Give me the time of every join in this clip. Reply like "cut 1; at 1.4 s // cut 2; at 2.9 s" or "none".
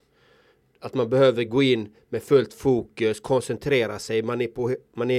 none

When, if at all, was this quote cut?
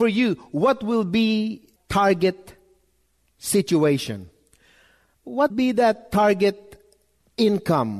cut 1; at 1.8 s // cut 2; at 5.5 s

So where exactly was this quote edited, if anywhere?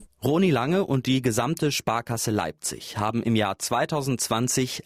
none

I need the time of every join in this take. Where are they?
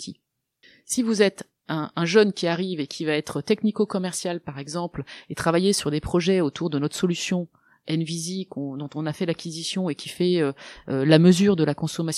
none

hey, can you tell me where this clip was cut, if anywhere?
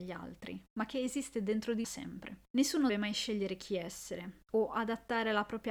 cut 1; at 1.8 s // cut 2; at 2.9 s

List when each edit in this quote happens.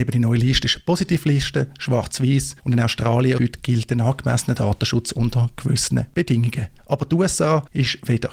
cut 1; at 2.6 s // cut 2; at 3.4 s // cut 3; at 6.8 s

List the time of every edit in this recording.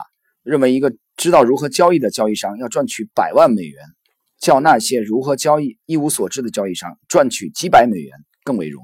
none

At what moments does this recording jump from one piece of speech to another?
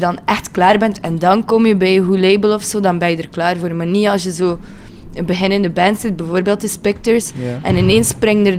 none

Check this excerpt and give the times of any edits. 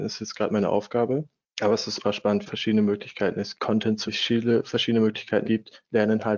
cut 1; at 2.0 s // cut 2; at 2.5 s // cut 3; at 3.6 s // cut 4; at 4.1 s // cut 5; at 5.4 s

